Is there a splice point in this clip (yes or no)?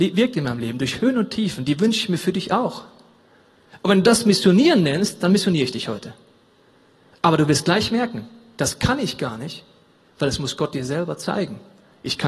no